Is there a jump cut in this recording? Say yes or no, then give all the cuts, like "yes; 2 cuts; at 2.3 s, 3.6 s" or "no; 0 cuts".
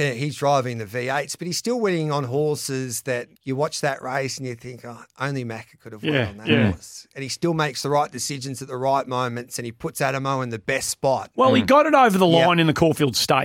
yes; 1 cut; at 3.3 s